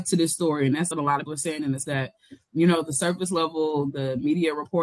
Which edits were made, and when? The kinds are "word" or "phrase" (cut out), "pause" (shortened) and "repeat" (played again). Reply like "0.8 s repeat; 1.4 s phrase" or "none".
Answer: 0.9 s word; 1.3 s word; 1.8 s word

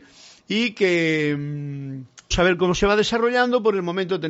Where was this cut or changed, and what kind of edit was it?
2.3 s word

